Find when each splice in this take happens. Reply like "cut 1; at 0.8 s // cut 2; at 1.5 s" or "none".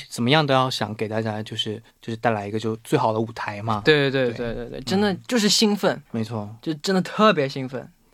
cut 1; at 1.9 s // cut 2; at 6.1 s